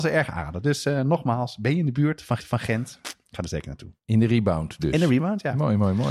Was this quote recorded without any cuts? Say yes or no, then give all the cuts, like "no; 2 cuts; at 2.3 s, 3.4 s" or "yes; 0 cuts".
no; 2 cuts; at 2.4 s, 4.0 s